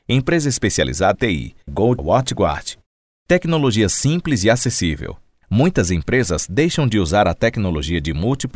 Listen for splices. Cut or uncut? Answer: cut